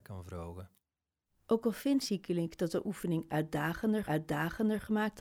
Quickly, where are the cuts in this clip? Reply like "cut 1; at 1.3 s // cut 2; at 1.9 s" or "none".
cut 1; at 2.0 s // cut 2; at 4.0 s